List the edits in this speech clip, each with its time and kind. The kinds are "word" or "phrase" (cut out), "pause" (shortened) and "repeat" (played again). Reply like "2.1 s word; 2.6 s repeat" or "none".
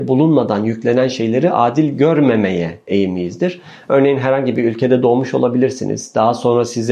none